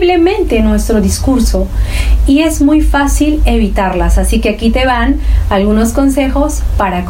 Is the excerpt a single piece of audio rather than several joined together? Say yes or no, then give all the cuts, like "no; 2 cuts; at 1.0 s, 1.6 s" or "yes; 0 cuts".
yes; 0 cuts